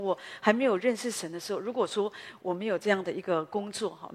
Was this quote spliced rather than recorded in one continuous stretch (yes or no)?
no